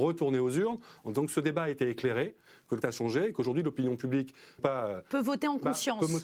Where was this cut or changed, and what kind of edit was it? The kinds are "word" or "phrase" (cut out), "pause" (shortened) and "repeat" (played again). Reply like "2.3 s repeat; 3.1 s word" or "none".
2.8 s word; 4.6 s word